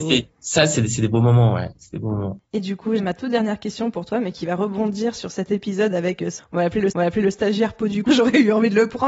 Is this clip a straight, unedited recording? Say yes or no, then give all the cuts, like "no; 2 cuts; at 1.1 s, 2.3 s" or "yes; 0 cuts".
no; 5 cuts; at 2.4 s, 3.0 s, 6.4 s, 6.9 s, 8.1 s